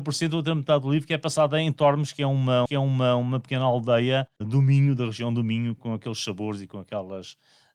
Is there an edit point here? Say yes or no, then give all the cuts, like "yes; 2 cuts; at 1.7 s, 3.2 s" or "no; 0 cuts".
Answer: yes; 1 cut; at 2.7 s